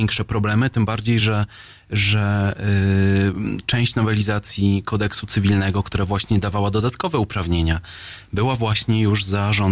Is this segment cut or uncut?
uncut